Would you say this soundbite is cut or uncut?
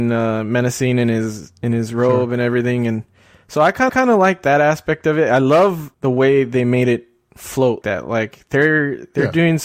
cut